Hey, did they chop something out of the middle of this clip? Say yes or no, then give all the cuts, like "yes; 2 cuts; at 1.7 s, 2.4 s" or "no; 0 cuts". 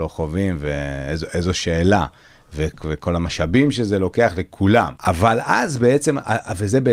yes; 1 cut; at 5.0 s